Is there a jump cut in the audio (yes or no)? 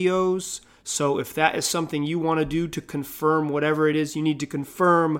no